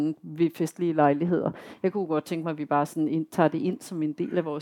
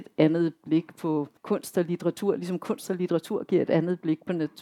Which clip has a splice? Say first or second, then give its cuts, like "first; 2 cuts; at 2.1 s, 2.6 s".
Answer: second; 1 cut; at 1.4 s